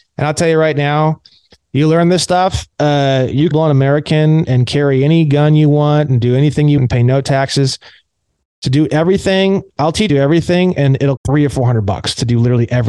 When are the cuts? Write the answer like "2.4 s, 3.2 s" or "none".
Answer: 2.7 s, 3.5 s, 4.5 s, 6.8 s, 10.1 s, 11.2 s